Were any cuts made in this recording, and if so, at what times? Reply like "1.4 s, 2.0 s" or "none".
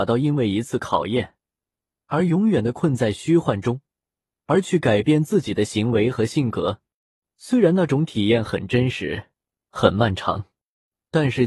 none